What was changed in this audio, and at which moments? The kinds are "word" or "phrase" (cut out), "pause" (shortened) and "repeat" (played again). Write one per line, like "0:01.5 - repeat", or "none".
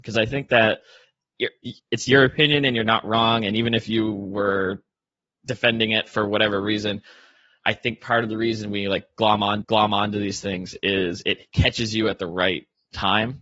0:09.6 - repeat
0:11.5 - pause